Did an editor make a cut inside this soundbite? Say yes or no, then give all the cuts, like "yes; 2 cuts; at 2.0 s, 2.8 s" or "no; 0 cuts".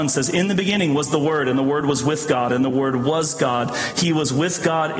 no; 0 cuts